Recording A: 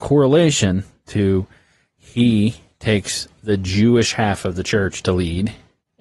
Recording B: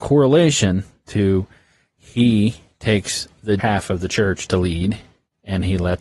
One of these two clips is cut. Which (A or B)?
B